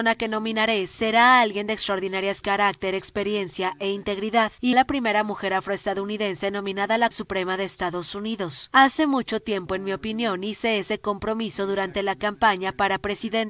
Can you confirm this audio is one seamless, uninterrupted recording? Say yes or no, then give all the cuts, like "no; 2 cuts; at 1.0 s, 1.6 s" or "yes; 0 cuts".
no; 3 cuts; at 2.4 s, 4.7 s, 7.1 s